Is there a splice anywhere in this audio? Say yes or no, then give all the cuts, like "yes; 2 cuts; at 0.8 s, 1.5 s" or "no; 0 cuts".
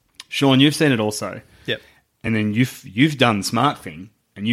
no; 0 cuts